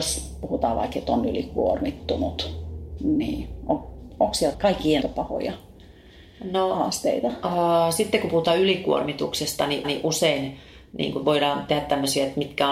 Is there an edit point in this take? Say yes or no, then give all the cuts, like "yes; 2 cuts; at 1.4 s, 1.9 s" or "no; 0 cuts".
yes; 3 cuts; at 4.5 s, 5.0 s, 9.8 s